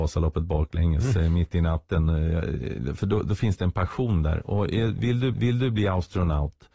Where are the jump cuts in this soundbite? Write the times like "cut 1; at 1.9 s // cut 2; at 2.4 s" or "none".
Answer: cut 1; at 5.3 s